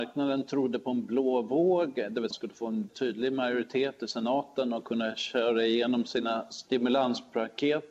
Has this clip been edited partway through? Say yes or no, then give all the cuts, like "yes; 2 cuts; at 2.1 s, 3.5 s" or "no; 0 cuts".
yes; 2 cuts; at 2.3 s, 2.9 s